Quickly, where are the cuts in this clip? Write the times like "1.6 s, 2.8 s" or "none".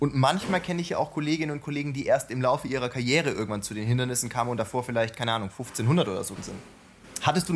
6.4 s